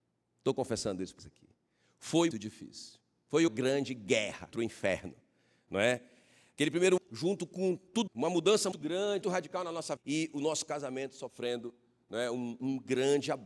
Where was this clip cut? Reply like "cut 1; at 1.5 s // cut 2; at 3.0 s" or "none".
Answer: cut 1; at 1.2 s // cut 2; at 2.3 s // cut 3; at 3.5 s // cut 4; at 4.5 s // cut 5; at 7.0 s // cut 6; at 8.1 s // cut 7; at 8.7 s // cut 8; at 9.2 s // cut 9; at 10.0 s